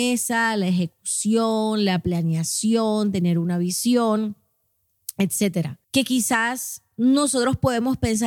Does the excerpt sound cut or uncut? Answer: cut